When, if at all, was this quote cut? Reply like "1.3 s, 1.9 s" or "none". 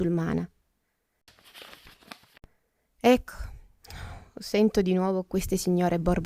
none